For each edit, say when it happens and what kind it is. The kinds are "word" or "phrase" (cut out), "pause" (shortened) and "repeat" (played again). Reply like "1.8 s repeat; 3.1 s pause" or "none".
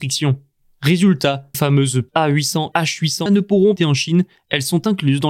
1.5 s word; 2.1 s word; 2.7 s word; 3.3 s phrase; 3.8 s phrase